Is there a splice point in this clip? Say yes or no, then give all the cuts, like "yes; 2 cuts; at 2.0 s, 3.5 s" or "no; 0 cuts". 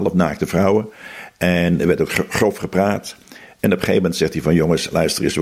no; 0 cuts